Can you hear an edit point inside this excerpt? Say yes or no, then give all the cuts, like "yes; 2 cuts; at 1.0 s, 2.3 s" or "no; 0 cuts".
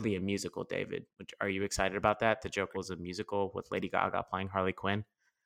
yes; 1 cut; at 2.7 s